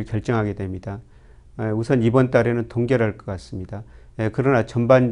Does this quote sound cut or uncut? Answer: uncut